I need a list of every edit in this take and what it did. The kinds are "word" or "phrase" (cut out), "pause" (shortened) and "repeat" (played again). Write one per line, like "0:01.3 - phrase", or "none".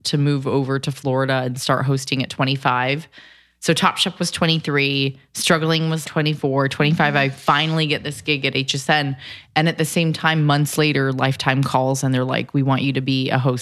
0:06.0 - word